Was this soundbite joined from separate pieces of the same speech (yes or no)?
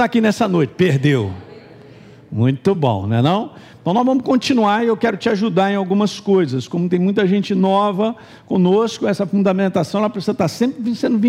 no